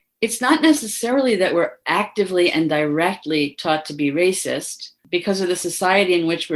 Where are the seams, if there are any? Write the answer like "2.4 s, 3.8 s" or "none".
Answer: 5.0 s